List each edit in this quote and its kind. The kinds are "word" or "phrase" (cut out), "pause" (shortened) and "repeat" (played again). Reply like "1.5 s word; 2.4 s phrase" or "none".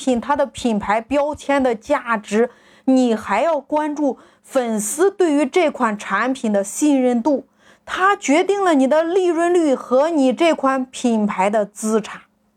none

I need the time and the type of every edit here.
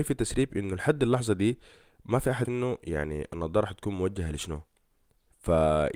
2.4 s word

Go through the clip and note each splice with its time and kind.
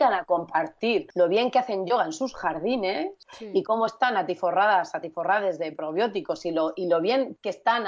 none

